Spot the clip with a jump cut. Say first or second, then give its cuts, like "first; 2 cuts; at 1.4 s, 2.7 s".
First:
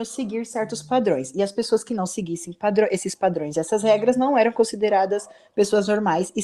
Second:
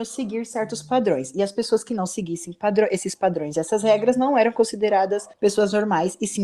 second; 1 cut; at 5.3 s